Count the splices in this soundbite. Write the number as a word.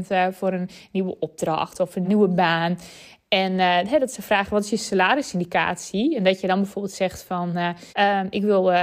two